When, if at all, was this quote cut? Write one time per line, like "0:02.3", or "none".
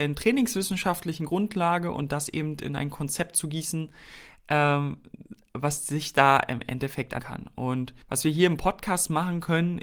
0:07.2
0:08.0

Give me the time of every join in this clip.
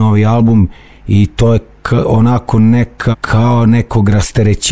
0:03.1

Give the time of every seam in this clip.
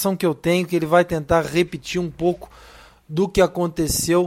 none

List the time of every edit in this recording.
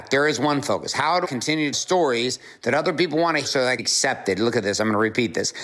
0:01.2
0:01.7
0:03.4
0:03.8

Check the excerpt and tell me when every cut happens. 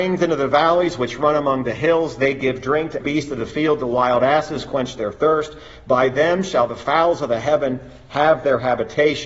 0:03.0

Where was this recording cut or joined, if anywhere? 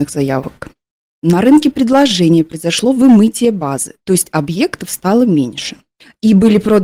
none

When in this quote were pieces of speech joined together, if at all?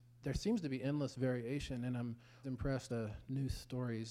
0:02.4
0:02.9

